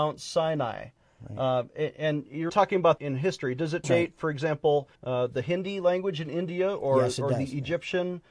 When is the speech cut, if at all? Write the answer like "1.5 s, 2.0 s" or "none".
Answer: 2.5 s, 3.0 s, 3.8 s, 5.0 s